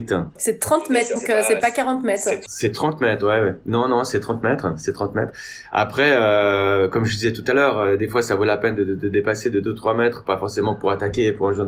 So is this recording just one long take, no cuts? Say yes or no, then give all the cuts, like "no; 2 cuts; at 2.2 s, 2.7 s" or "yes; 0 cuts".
no; 1 cut; at 1.2 s